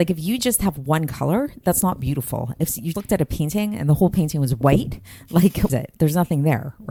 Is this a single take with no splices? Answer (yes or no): no